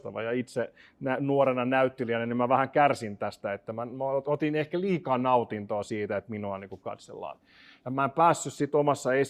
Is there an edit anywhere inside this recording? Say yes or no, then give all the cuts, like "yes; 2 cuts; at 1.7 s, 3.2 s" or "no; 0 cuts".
no; 0 cuts